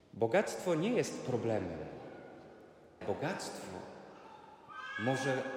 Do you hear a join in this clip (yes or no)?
yes